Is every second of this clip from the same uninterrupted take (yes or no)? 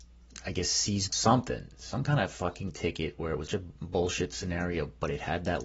no